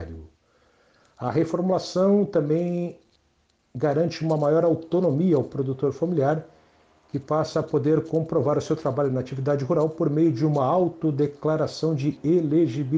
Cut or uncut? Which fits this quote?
uncut